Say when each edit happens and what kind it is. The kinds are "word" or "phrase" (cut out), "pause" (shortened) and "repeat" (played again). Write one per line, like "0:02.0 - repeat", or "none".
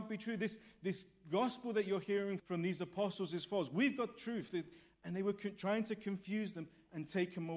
0:02.4 - word